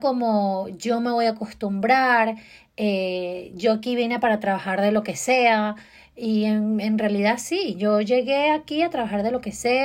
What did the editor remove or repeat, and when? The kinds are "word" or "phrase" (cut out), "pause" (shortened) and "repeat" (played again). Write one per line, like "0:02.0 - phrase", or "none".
none